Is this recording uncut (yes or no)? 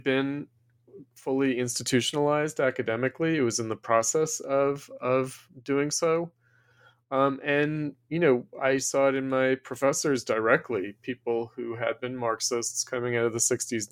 yes